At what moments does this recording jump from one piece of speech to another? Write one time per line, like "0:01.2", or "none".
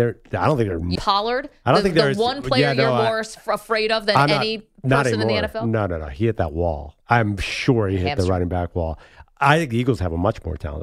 0:01.0
0:04.8
0:07.0